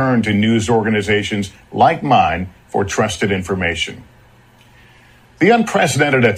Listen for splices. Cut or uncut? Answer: uncut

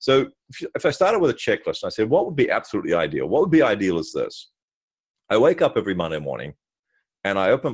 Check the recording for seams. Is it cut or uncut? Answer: uncut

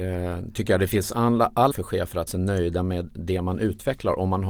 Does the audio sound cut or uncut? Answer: cut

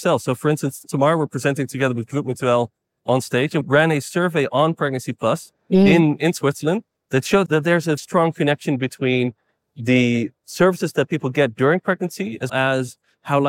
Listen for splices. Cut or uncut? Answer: cut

